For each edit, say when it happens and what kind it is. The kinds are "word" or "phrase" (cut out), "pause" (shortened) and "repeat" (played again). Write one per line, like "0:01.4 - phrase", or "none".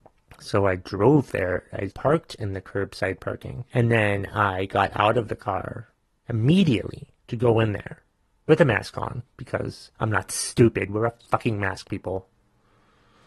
0:01.9 - word
0:03.7 - pause
0:07.2 - pause
0:09.9 - pause